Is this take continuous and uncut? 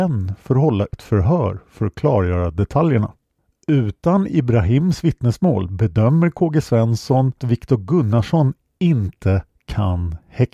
no; 2 cuts; at 0.9 s, 7.4 s

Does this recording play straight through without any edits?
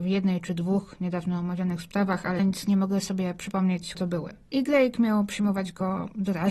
no; 3 cuts; at 2.4 s, 3.9 s, 4.4 s

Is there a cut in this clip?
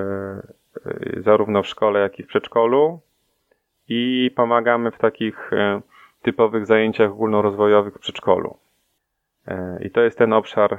no; 0 cuts

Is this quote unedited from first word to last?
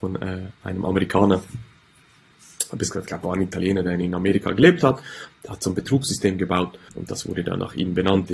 no; 1 cut; at 6.9 s

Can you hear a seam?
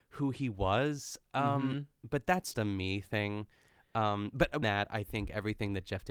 yes; 2 cuts; at 2.5 s, 4.6 s

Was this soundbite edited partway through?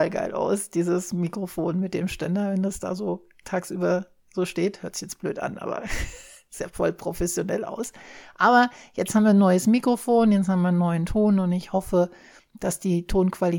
no; 0 cuts

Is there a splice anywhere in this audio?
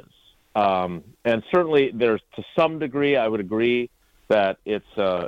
no; 0 cuts

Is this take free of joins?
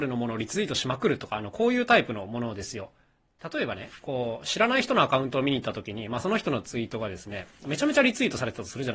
yes; 0 cuts

